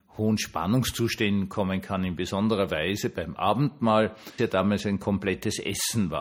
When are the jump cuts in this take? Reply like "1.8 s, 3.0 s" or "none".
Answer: 4.4 s